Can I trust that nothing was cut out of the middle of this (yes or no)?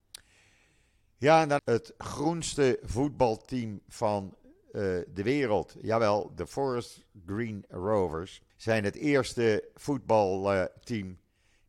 no